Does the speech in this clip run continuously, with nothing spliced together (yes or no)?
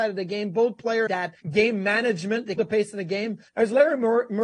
no